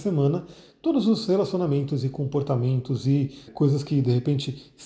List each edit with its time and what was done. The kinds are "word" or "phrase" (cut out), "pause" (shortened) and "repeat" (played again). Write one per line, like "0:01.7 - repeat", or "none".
0:03.5 - word